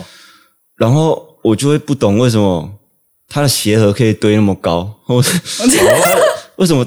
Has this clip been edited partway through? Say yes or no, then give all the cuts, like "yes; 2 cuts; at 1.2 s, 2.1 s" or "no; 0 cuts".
no; 0 cuts